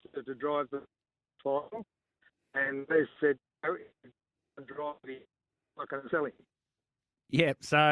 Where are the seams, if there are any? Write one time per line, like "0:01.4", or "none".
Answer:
none